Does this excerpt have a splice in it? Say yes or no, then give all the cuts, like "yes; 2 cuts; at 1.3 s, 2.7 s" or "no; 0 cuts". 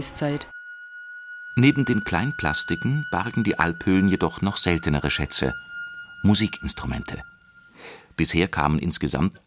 no; 0 cuts